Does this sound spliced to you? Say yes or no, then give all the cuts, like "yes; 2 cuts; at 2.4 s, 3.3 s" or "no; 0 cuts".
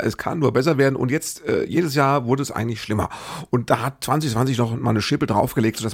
no; 0 cuts